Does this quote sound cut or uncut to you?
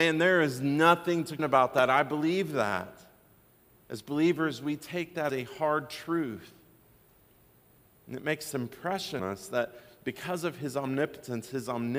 cut